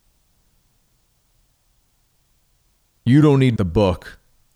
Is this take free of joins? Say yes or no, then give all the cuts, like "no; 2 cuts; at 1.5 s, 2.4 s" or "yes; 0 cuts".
no; 1 cut; at 3.6 s